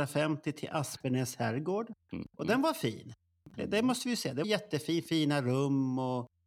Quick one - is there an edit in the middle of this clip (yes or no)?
yes